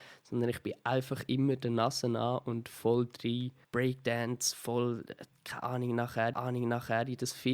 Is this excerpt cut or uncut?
cut